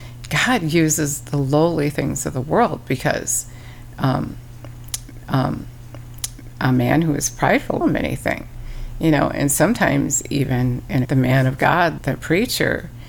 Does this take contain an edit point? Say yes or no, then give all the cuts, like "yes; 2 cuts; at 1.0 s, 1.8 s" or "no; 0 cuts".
yes; 4 cuts; at 5.2 s, 7.8 s, 11.0 s, 12.0 s